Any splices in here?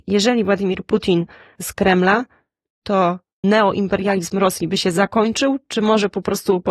yes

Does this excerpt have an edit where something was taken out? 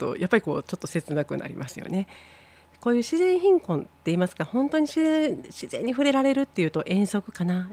no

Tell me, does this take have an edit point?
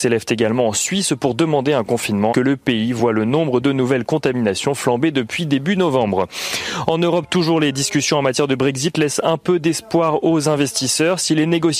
yes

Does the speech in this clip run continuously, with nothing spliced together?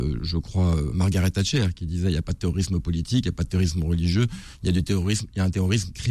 yes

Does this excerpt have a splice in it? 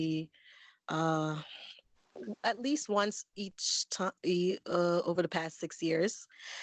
no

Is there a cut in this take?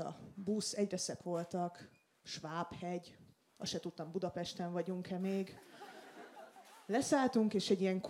yes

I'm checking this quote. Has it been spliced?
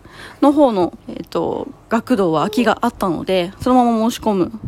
yes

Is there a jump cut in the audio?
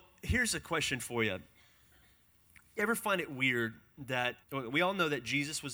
yes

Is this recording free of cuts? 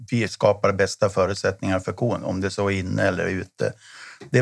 yes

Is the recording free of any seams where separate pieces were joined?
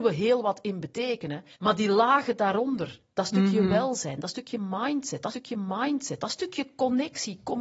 no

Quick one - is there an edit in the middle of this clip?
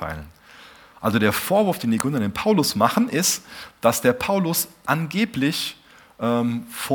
no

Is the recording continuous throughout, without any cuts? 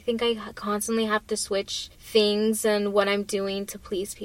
no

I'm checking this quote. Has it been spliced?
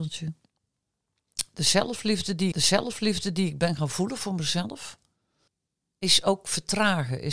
yes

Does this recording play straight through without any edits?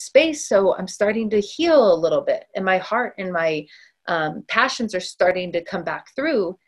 yes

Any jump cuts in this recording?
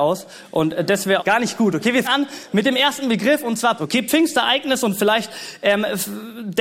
yes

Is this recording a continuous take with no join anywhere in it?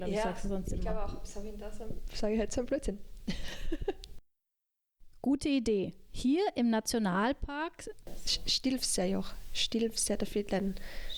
yes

